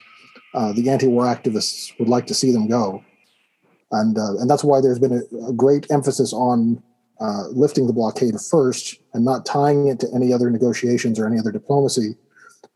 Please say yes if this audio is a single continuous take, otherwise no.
yes